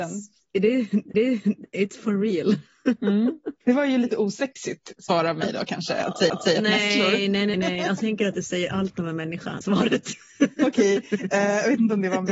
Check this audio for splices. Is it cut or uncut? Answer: cut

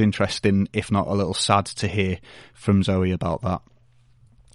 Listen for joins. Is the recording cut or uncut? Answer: uncut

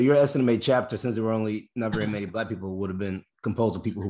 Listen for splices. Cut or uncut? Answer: uncut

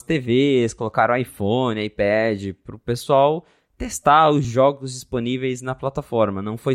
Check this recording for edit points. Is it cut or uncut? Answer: uncut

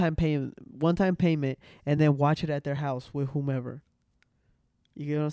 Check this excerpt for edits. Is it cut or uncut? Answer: uncut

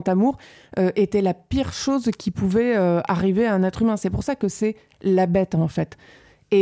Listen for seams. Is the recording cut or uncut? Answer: uncut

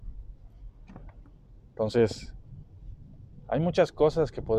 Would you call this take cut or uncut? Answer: uncut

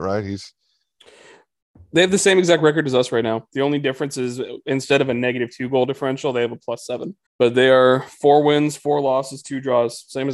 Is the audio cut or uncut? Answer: cut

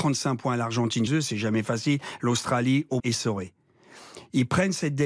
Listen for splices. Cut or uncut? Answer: cut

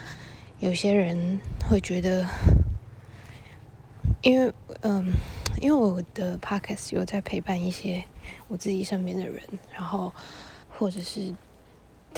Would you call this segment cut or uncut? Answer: cut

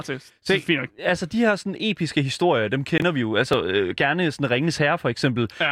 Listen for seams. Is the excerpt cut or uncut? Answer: uncut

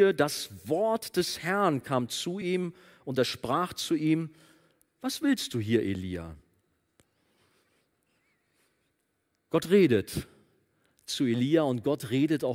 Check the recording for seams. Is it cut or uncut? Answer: uncut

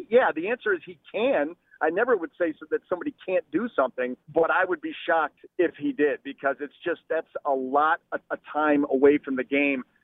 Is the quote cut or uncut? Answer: cut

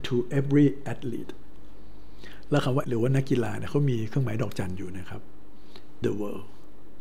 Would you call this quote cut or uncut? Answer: cut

